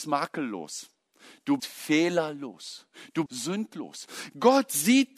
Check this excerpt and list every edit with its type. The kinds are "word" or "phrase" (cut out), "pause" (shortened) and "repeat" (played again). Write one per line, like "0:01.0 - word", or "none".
0:01.6 - word
0:03.3 - word